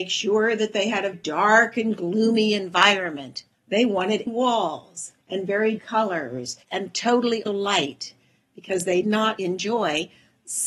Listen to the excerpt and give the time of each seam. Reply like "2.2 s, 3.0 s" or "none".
1.1 s, 3.5 s, 4.3 s, 5.2 s, 5.8 s, 6.6 s, 7.5 s, 9.0 s, 9.4 s

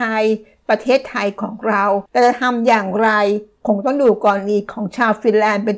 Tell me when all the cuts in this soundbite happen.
2.1 s

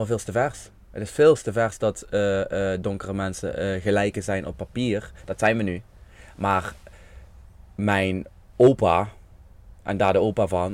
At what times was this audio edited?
9.8 s

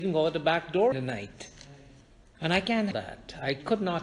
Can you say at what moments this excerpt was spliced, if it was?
0.9 s, 2.1 s, 2.9 s

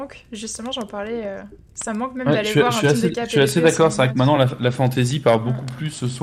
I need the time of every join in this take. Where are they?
none

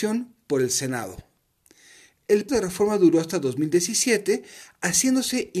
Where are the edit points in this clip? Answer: 2.5 s

